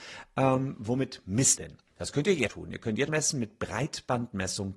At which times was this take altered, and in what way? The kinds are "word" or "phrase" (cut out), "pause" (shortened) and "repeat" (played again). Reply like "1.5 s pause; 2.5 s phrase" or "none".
1.6 s word; 2.5 s word; 3.1 s word